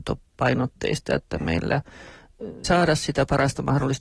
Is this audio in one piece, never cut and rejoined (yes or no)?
no